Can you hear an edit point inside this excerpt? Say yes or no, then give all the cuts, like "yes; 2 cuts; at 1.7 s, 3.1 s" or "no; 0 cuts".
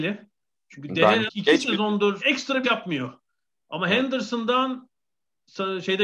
yes; 3 cuts; at 1.3 s, 2.2 s, 2.6 s